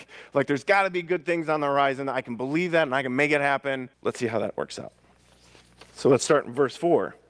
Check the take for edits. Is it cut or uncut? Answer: cut